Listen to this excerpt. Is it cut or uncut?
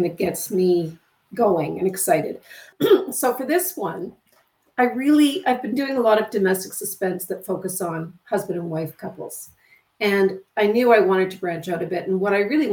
uncut